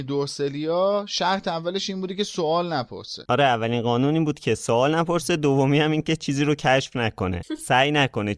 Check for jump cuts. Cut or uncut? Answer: uncut